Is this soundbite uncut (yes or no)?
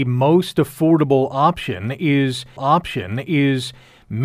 no